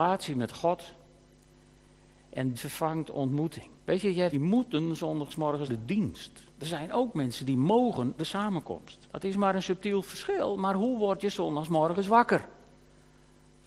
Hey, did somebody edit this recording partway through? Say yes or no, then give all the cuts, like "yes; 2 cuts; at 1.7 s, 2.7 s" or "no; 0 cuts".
yes; 7 cuts; at 2.5 s, 3.8 s, 4.3 s, 5.7 s, 6.5 s, 8.2 s, 9.0 s